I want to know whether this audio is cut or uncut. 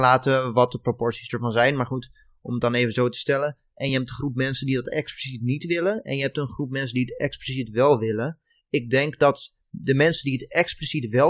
uncut